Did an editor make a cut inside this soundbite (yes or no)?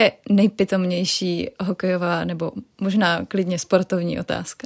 no